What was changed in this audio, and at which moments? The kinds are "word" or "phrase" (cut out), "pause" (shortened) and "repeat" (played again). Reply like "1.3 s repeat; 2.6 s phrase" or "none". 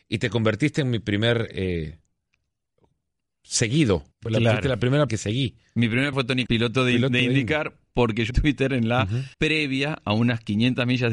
4.1 s pause; 5.1 s phrase; 6.1 s word; 6.5 s word; 8.3 s word; 9.3 s pause